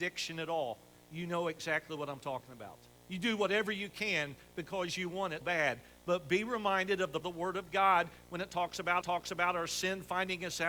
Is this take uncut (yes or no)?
no